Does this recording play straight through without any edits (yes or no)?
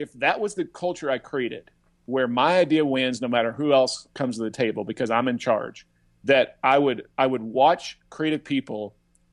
no